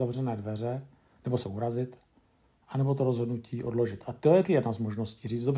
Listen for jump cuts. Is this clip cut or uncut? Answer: cut